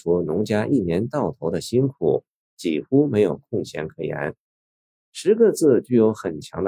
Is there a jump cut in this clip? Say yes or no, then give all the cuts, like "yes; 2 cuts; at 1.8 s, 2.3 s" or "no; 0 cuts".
no; 0 cuts